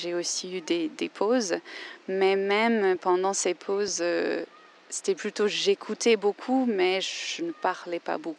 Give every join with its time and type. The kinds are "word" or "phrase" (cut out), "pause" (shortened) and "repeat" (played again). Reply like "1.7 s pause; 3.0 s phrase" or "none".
none